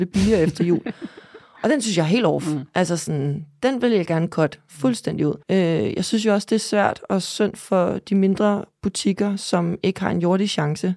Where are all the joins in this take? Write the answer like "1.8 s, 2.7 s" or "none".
5.4 s

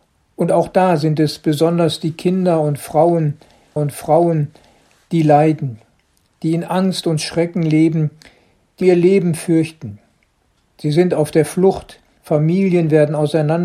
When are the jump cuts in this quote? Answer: 3.8 s, 8.8 s, 12.2 s

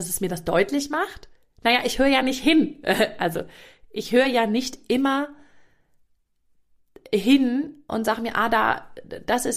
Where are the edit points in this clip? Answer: none

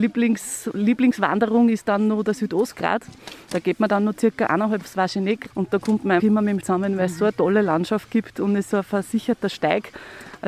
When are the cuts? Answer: 4.8 s, 5.5 s, 6.2 s, 6.6 s, 8.7 s

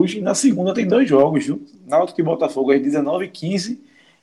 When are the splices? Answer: none

